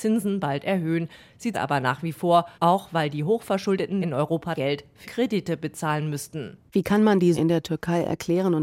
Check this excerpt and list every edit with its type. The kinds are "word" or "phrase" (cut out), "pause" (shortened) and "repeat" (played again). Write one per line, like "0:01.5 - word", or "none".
0:01.5 - word
0:02.5 - pause
0:04.0 - word
0:04.6 - phrase
0:05.0 - word
0:06.7 - pause
0:07.3 - word